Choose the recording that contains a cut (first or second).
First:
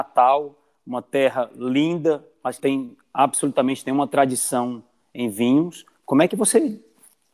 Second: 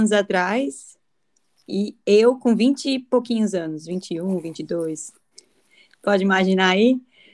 first